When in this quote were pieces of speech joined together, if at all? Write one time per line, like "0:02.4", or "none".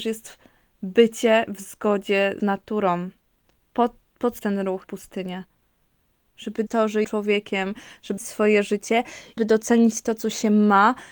0:01.5
0:02.4
0:04.4
0:04.8
0:06.7
0:07.0
0:08.2
0:09.4